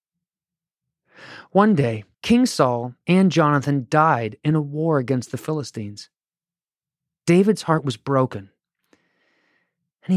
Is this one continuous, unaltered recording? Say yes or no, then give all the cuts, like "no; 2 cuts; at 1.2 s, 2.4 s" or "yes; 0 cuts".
no; 1 cut; at 2.1 s